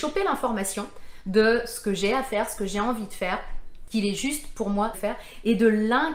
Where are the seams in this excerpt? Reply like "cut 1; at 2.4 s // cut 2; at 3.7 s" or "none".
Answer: cut 1; at 3.9 s // cut 2; at 4.9 s